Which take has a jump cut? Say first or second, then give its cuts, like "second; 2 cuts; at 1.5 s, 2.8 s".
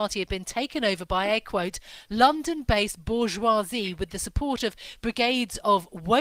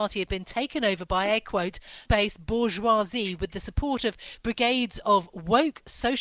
second; 1 cut; at 2.1 s